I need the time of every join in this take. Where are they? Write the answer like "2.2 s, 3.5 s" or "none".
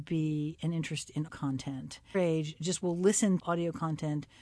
1.3 s, 2.1 s, 3.4 s